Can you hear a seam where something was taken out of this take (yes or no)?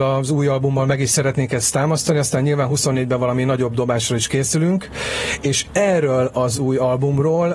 no